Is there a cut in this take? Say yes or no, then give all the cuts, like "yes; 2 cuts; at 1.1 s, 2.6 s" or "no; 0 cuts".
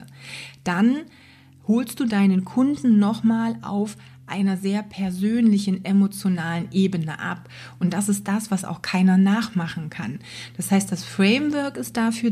no; 0 cuts